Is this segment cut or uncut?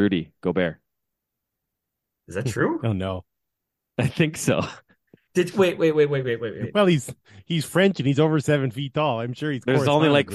uncut